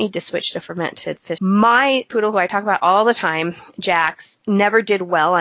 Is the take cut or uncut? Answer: cut